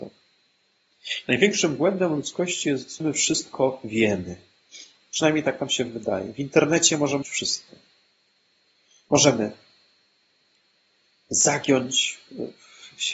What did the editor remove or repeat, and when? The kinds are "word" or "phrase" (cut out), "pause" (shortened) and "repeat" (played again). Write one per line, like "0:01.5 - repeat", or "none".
0:03.0 - phrase
0:07.2 - word